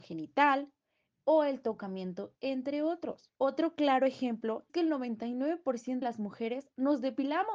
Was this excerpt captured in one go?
no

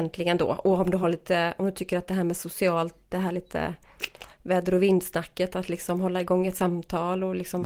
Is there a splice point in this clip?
no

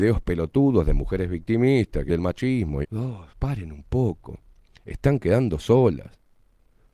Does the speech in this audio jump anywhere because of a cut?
yes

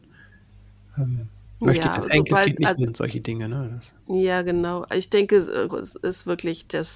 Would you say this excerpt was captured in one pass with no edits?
no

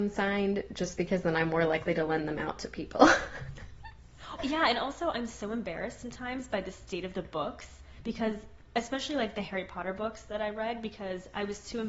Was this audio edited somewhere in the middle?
yes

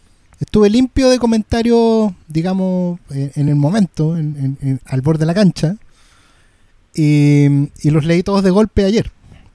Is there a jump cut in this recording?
no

